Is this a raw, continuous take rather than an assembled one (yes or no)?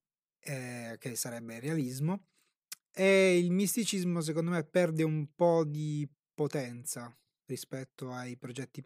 yes